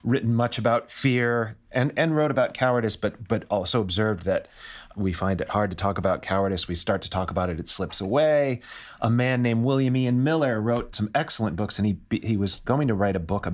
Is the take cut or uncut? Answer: uncut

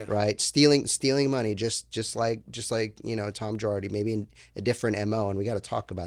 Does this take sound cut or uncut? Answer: uncut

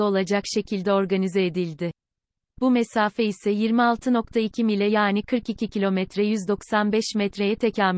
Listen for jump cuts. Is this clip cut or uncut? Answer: uncut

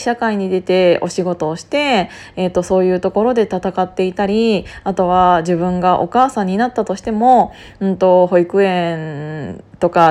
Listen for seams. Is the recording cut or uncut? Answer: uncut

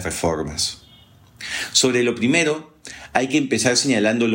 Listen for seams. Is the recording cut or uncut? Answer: uncut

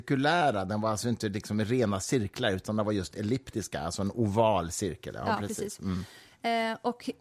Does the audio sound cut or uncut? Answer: uncut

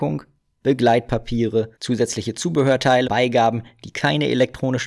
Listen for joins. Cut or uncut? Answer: cut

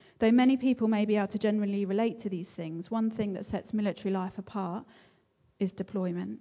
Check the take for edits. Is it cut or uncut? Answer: uncut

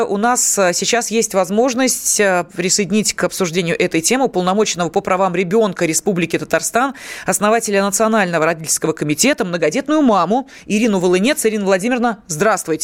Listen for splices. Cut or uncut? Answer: uncut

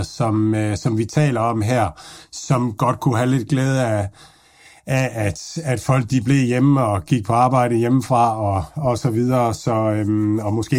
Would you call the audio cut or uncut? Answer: uncut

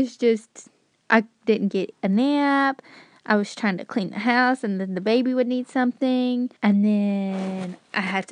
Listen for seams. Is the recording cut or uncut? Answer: cut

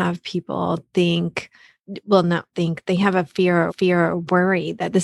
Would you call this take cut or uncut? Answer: cut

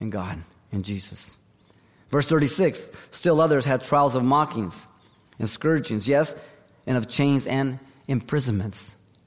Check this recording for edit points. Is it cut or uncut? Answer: uncut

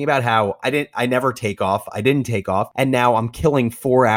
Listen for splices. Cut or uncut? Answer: uncut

